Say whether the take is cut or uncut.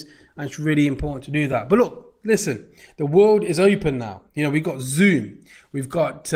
uncut